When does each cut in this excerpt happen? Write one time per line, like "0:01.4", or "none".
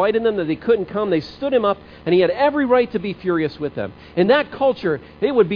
none